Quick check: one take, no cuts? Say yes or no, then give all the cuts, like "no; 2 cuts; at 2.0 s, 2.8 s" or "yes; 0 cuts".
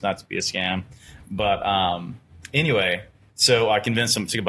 yes; 0 cuts